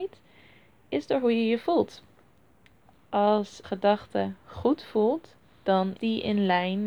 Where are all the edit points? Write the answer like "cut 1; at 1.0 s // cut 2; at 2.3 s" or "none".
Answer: cut 1; at 3.6 s // cut 2; at 6.0 s